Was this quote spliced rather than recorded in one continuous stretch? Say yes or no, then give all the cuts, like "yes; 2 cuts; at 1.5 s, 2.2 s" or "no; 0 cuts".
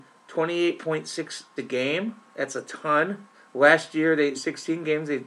yes; 3 cuts; at 1.6 s, 3.3 s, 4.3 s